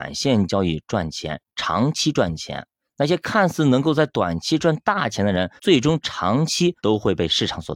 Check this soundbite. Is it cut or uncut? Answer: cut